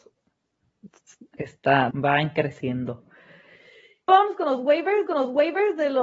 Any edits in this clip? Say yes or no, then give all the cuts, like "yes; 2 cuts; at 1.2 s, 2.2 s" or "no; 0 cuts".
yes; 3 cuts; at 1.9 s, 4.1 s, 5.1 s